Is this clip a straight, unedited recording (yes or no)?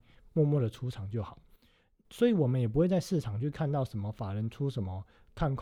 yes